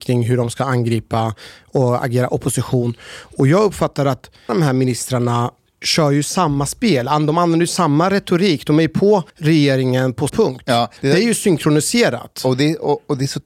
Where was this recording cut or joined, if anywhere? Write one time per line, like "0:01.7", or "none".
0:04.5
0:09.3
0:10.3
0:11.0